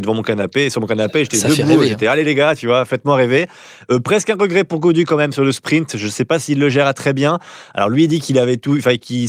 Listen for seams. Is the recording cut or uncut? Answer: uncut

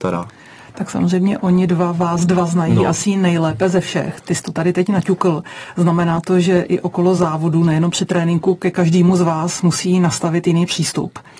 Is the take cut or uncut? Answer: uncut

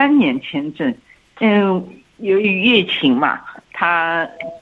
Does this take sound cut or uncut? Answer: uncut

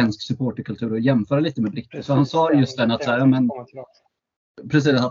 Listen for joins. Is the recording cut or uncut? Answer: uncut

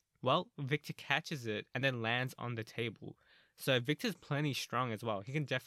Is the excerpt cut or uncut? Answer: uncut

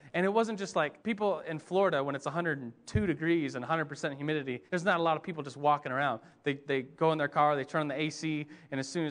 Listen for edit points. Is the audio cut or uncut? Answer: cut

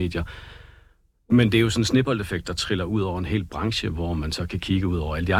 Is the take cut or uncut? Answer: uncut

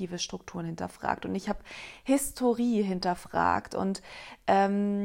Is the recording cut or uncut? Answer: uncut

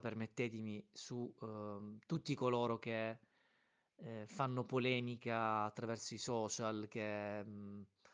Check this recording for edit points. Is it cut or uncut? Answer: uncut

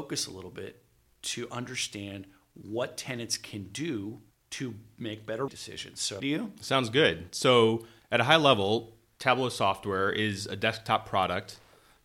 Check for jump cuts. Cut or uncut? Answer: cut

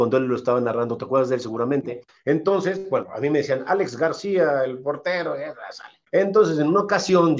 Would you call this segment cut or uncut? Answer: cut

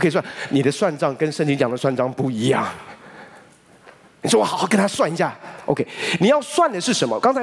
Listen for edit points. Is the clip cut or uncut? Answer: uncut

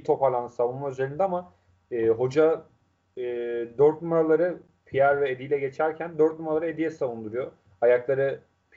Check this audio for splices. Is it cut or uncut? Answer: uncut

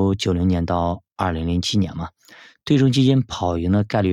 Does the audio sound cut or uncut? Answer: uncut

